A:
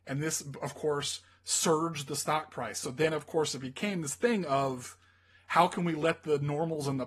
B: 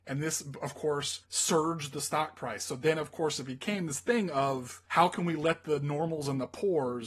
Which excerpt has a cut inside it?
B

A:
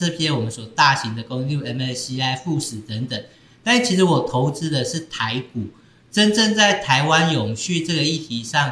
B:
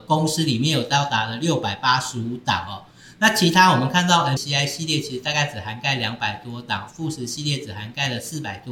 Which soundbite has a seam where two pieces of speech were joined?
B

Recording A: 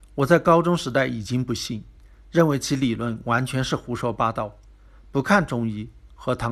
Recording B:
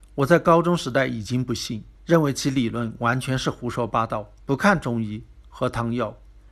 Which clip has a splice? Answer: B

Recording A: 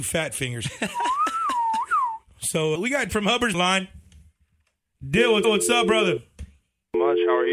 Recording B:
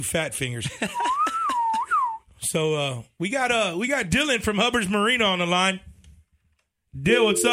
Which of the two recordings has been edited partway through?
A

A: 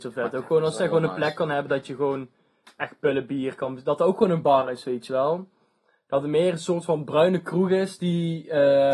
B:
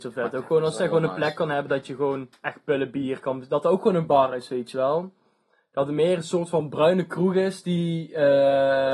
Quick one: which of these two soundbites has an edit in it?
B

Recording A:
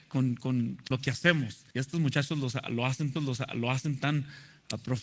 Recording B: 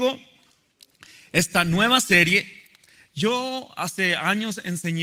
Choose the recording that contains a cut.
A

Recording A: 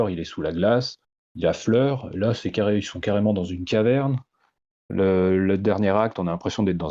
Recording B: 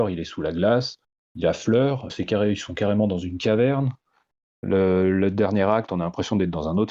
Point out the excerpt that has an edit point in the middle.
B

